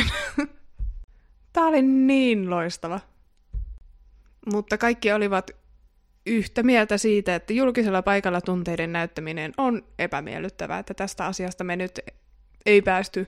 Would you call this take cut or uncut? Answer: uncut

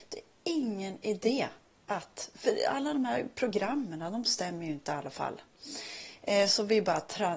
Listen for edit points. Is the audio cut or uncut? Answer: cut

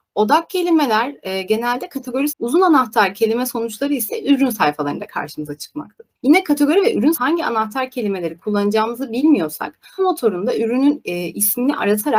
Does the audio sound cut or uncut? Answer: cut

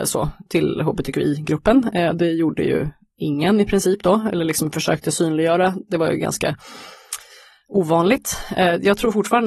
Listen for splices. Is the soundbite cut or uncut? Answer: uncut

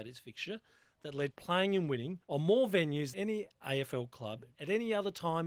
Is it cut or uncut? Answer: cut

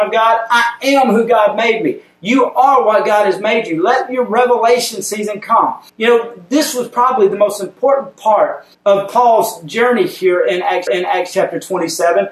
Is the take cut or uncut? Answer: cut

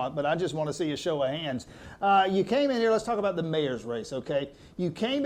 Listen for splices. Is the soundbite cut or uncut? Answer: uncut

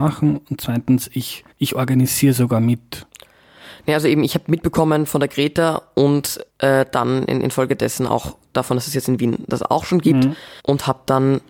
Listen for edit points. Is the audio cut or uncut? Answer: cut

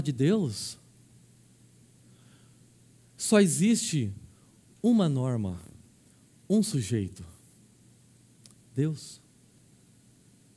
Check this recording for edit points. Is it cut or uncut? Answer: uncut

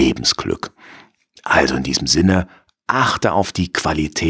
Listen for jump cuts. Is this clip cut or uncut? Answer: uncut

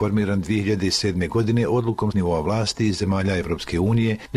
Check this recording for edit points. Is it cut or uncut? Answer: cut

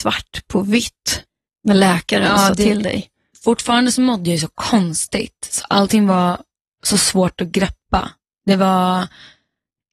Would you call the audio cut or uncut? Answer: uncut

